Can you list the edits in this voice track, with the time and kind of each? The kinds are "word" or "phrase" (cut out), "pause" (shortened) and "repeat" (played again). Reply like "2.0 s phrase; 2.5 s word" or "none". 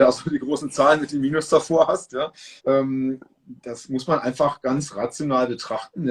2.6 s pause